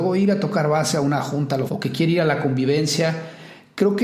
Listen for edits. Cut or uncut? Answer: cut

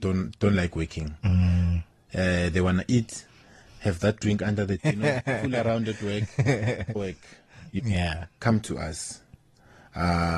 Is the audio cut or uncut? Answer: cut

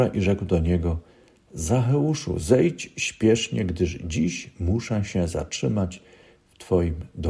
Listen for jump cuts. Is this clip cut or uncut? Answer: uncut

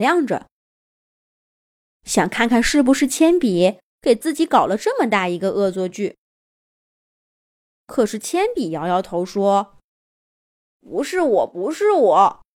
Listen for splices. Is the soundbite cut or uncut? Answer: cut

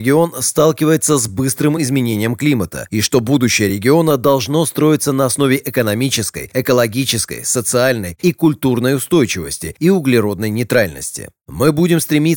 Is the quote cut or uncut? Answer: uncut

